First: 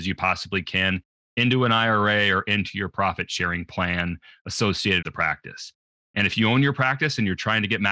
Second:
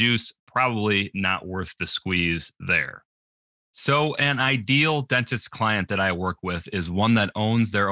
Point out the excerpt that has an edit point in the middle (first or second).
first